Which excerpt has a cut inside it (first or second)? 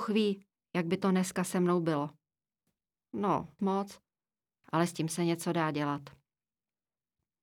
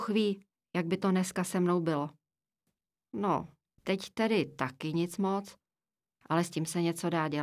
first